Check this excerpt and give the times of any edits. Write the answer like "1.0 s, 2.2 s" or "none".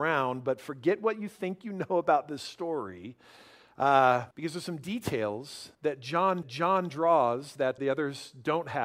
4.3 s, 5.7 s, 6.4 s, 7.8 s